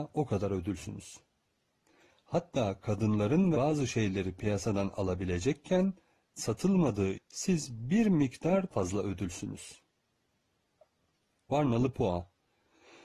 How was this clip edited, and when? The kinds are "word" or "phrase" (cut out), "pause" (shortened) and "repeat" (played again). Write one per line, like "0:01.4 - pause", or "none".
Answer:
0:03.5 - word
0:06.4 - word
0:07.1 - word
0:08.7 - word